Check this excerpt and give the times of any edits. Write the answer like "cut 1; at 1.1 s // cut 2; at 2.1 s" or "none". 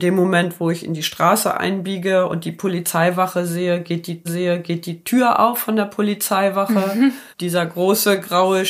cut 1; at 4.2 s // cut 2; at 7.3 s